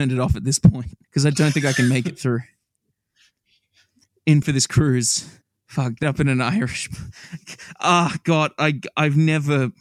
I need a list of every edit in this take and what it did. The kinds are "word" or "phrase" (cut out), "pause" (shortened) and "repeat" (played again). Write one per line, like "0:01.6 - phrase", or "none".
0:01.0 - pause
0:04.4 - word
0:05.4 - pause
0:06.0 - word